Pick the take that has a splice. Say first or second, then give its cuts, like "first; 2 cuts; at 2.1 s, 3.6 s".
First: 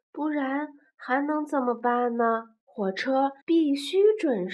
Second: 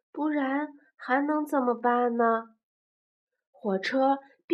first; 2 cuts; at 2.6 s, 3.4 s